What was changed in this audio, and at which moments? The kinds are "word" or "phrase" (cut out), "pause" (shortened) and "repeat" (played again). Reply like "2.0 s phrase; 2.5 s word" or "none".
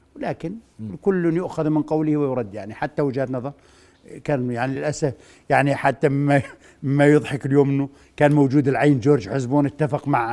none